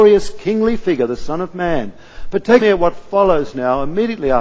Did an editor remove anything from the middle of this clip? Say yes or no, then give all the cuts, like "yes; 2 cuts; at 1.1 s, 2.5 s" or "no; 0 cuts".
yes; 1 cut; at 2.6 s